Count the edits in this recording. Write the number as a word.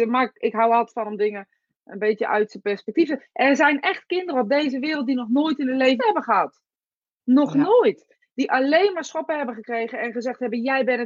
one